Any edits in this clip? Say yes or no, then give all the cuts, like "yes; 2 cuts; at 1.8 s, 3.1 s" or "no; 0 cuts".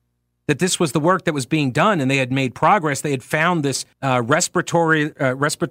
yes; 1 cut; at 3.9 s